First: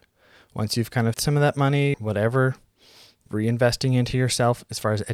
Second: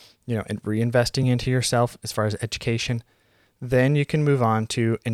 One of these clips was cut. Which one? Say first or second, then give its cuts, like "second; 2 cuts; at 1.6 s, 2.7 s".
first; 3 cuts; at 1.1 s, 1.9 s, 3.3 s